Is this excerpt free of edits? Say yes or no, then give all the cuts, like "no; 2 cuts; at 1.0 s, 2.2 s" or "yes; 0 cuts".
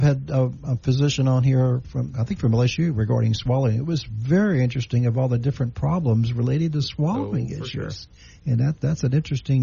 yes; 0 cuts